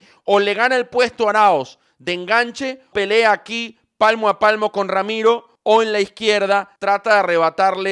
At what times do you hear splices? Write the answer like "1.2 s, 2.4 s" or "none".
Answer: 2.9 s, 5.6 s, 6.8 s